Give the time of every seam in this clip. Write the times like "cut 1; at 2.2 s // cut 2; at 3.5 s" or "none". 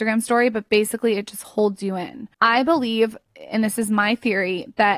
cut 1; at 2.3 s